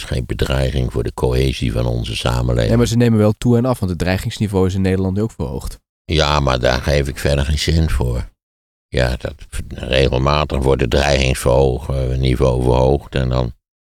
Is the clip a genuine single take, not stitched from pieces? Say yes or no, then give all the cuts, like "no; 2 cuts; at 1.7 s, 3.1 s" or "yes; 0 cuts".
yes; 0 cuts